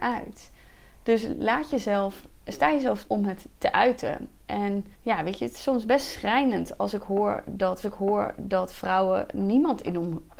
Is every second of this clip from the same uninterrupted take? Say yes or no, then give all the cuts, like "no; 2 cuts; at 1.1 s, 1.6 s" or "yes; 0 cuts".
no; 3 cuts; at 3.0 s, 4.9 s, 7.8 s